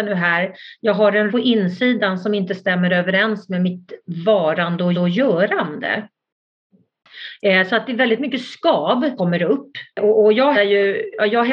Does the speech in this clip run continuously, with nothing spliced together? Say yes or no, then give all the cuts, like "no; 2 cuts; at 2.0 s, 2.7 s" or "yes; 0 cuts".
no; 5 cuts; at 1.3 s, 4.9 s, 9.2 s, 9.9 s, 10.5 s